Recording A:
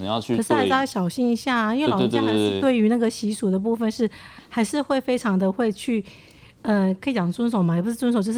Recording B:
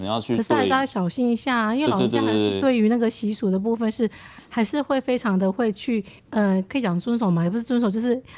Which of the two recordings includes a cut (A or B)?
B